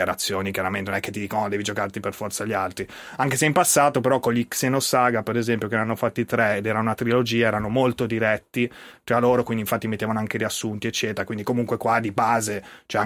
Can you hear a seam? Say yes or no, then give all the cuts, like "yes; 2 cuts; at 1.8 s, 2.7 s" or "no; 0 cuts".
no; 0 cuts